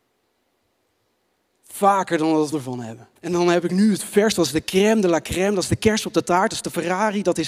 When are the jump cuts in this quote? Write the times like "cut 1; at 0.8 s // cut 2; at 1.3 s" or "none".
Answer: cut 1; at 2.5 s // cut 2; at 3.2 s